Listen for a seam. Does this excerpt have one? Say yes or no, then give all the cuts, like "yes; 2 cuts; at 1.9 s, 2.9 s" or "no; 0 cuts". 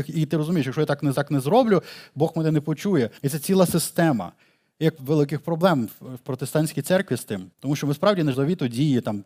yes; 6 cuts; at 1.1 s, 3.2 s, 4.4 s, 5.0 s, 7.5 s, 8.3 s